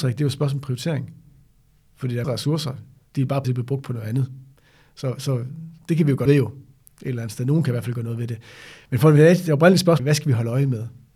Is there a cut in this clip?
yes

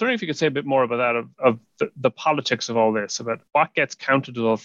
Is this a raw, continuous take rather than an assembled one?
no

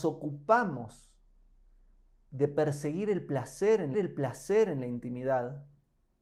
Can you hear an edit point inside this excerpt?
yes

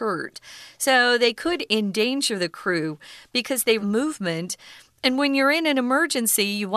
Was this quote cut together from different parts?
yes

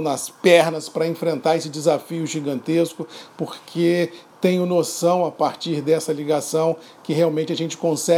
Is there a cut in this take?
no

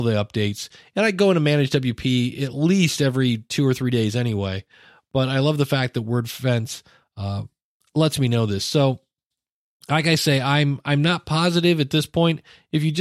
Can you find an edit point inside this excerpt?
no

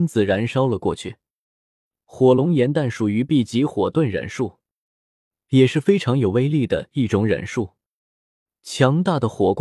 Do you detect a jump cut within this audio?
no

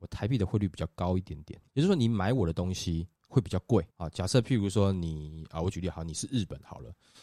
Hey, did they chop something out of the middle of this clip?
yes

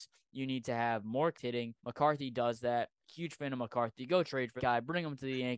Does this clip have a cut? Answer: yes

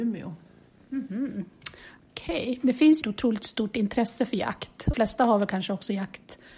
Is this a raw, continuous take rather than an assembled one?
no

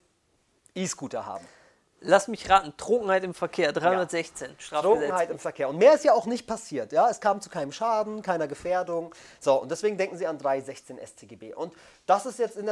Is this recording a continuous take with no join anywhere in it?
yes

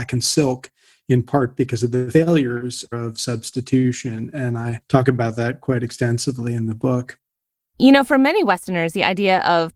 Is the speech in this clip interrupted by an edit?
no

